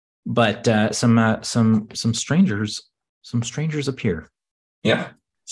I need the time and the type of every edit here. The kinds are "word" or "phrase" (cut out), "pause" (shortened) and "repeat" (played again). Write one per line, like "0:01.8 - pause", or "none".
none